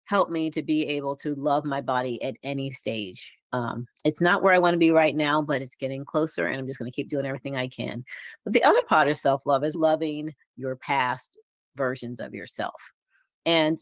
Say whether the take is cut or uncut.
cut